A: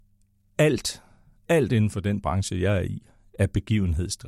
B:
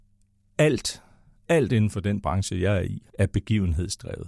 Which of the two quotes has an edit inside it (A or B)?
B